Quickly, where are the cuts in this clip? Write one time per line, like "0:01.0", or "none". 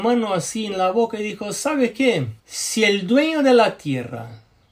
0:02.4